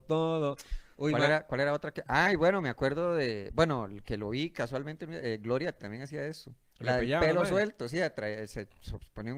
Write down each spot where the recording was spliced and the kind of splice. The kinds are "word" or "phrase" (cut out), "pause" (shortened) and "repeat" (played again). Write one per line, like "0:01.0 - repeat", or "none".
0:05.8 - word
0:06.7 - pause